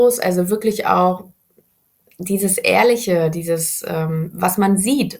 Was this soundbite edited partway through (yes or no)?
no